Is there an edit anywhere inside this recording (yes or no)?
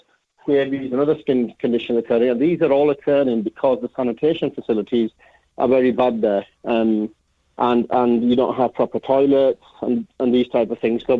no